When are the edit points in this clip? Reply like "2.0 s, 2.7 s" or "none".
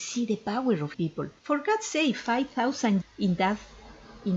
0.9 s, 1.4 s, 3.0 s